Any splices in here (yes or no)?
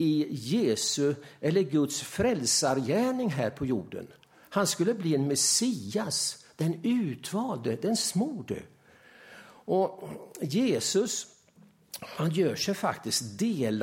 no